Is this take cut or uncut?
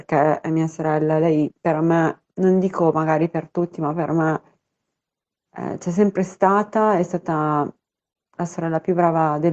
cut